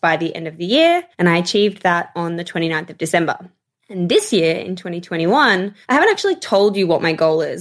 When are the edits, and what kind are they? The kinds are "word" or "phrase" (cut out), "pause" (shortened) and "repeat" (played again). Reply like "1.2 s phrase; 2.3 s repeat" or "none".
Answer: 1.1 s pause; 3.6 s pause; 5.8 s pause